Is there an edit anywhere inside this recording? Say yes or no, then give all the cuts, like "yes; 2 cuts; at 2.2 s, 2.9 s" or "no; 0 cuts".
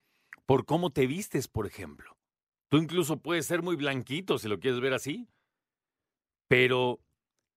no; 0 cuts